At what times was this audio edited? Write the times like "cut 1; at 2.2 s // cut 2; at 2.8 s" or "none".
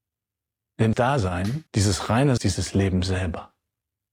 cut 1; at 0.9 s // cut 2; at 1.7 s // cut 3; at 2.4 s